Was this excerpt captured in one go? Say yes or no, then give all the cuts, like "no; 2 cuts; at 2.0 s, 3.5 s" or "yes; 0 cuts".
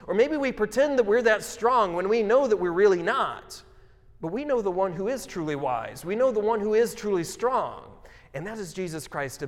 yes; 0 cuts